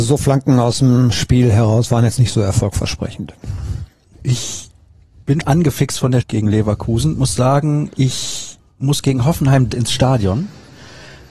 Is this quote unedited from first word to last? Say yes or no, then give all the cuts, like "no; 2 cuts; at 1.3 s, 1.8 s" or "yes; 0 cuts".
no; 4 cuts; at 5.4 s, 6.2 s, 7.2 s, 9.7 s